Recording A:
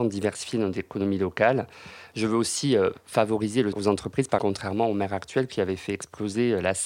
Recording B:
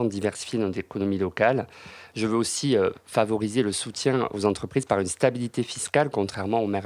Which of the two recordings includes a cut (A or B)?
A